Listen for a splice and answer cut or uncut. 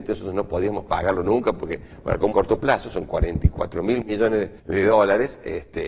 cut